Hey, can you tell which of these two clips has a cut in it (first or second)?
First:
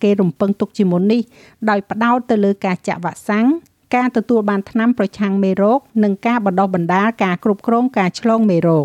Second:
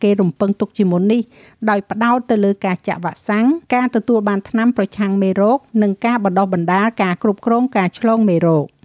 second